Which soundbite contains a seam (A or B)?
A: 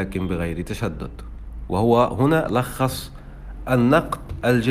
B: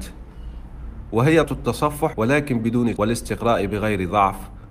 B